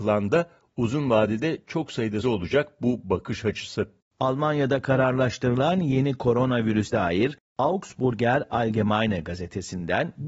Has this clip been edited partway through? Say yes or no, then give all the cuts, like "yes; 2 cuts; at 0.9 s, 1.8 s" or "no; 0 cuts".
yes; 2 cuts; at 2.2 s, 6.9 s